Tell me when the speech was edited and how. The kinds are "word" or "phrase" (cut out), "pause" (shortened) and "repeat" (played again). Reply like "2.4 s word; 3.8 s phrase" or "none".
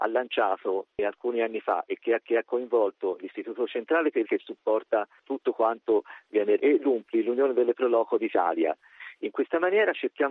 2.2 s repeat; 4.2 s phrase; 6.6 s word